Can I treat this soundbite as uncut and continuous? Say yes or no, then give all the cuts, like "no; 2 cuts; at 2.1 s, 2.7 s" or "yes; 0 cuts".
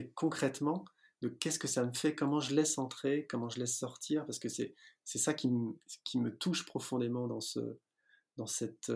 yes; 0 cuts